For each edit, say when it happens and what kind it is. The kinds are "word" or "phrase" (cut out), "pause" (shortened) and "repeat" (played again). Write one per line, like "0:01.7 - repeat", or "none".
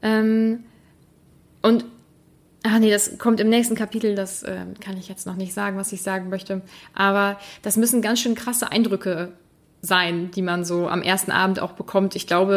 none